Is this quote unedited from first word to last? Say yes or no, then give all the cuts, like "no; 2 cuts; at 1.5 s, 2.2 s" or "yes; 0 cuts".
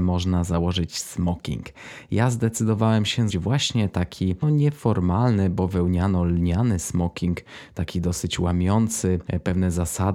no; 2 cuts; at 3.3 s, 4.4 s